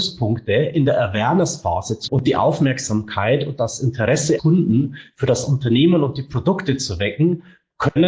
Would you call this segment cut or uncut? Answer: cut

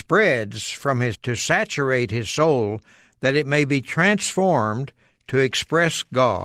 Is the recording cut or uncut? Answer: cut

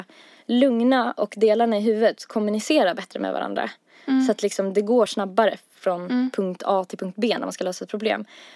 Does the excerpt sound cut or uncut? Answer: uncut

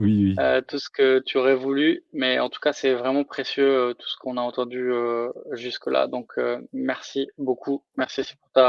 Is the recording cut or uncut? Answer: uncut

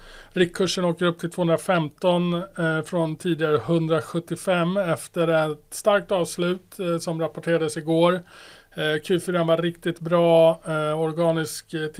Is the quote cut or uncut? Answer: uncut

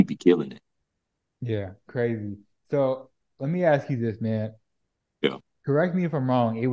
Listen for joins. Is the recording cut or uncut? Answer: uncut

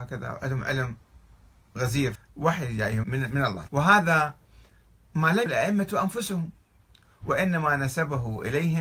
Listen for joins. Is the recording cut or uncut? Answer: cut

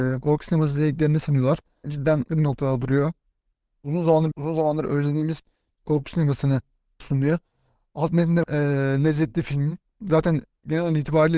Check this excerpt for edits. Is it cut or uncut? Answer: cut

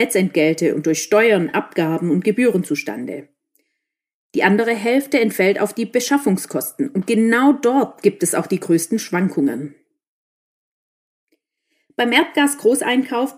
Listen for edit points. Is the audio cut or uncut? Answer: uncut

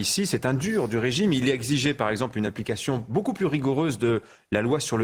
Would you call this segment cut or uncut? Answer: uncut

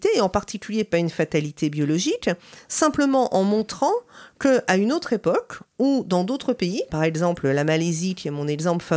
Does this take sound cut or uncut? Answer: cut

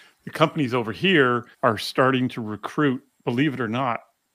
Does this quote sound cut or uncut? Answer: cut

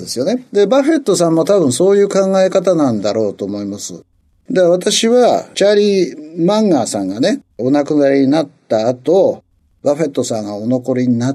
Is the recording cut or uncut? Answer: cut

